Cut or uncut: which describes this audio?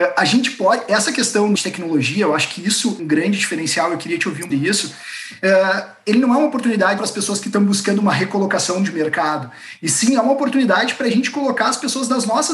cut